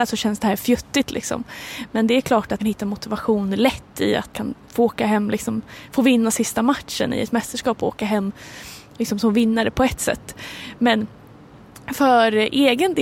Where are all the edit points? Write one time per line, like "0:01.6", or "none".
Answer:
0:02.6
0:04.3
0:04.6